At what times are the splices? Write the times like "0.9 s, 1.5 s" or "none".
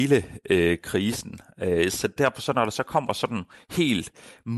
2.2 s